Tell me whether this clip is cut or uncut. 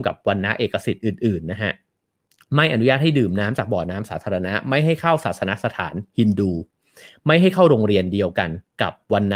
uncut